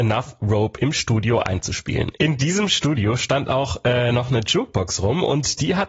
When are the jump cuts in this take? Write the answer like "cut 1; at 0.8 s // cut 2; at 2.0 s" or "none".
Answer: none